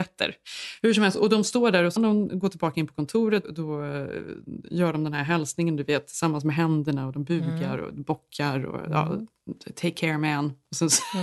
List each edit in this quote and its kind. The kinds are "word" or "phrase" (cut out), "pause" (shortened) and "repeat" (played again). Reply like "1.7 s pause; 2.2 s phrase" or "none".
2.0 s word; 3.4 s word